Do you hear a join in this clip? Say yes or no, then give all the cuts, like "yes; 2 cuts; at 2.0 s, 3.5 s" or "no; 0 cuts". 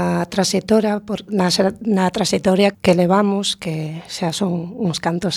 yes; 1 cut; at 2.7 s